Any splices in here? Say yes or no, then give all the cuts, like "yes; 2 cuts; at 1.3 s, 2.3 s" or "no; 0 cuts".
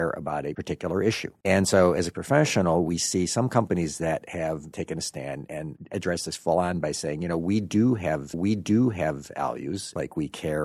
yes; 2 cuts; at 2.1 s, 8.3 s